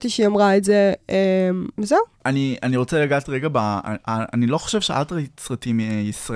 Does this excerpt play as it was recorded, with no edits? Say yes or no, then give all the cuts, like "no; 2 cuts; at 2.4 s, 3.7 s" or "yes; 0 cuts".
no; 1 cut; at 1.7 s